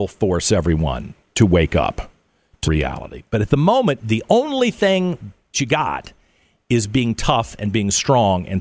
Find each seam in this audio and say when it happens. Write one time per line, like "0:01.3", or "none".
0:02.6
0:05.5